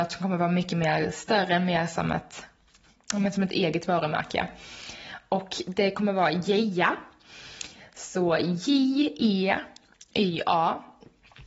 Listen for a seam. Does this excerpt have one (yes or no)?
no